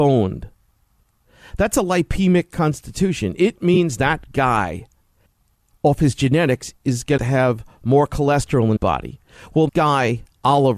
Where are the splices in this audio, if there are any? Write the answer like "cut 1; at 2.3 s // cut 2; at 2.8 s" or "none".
cut 1; at 5.3 s // cut 2; at 7.2 s // cut 3; at 8.8 s // cut 4; at 9.7 s